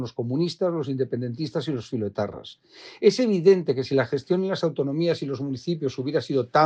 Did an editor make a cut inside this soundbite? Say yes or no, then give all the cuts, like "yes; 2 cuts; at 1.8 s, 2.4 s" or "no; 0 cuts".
no; 0 cuts